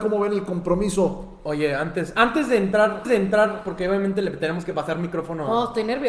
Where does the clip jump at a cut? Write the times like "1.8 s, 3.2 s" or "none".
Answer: 3.0 s